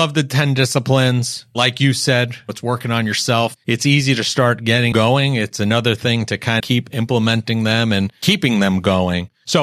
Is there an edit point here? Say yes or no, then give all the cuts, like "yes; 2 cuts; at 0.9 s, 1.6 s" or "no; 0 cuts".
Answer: yes; 2 cuts; at 4.9 s, 6.6 s